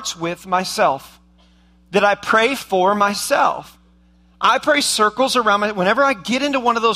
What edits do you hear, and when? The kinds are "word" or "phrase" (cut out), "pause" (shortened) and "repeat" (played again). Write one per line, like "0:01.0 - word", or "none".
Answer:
none